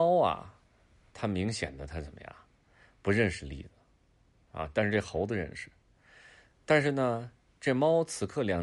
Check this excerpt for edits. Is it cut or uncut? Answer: uncut